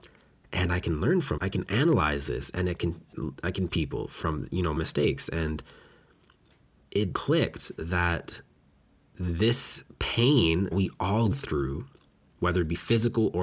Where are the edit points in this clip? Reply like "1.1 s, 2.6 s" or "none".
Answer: 1.4 s, 3.7 s, 4.8 s, 7.1 s, 10.7 s, 11.3 s